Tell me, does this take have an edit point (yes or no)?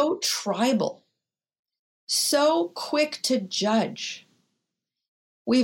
no